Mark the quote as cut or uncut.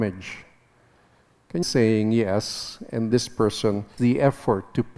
cut